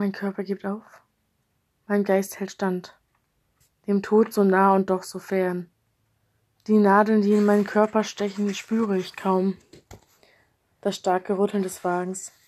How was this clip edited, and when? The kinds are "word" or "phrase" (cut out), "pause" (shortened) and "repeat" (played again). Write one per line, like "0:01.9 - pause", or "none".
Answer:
none